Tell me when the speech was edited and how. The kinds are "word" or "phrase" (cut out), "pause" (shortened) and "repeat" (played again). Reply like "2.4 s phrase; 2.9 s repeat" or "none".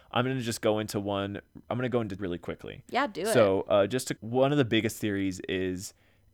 1.7 s word; 2.2 s word; 4.2 s word